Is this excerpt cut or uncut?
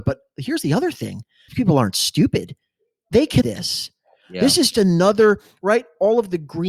cut